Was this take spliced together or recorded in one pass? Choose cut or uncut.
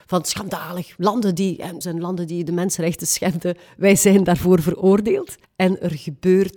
cut